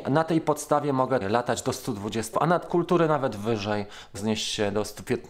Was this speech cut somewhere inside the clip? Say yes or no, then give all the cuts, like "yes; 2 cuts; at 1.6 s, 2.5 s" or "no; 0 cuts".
yes; 4 cuts; at 1.2 s, 2.3 s, 2.7 s, 4.1 s